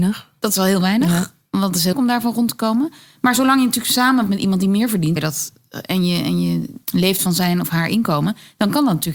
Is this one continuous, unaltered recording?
no; 4 cuts; at 1.9 s, 4.3 s, 5.2 s, 6.8 s

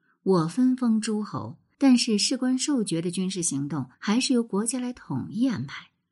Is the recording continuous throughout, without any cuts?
no; 2 cuts; at 1.7 s, 3.9 s

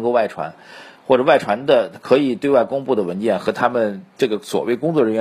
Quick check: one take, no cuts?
yes; 0 cuts

